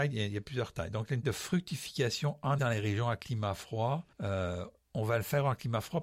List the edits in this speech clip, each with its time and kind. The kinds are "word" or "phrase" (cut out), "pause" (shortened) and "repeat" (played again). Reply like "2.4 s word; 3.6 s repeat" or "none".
1.2 s word; 2.6 s word; 4.1 s pause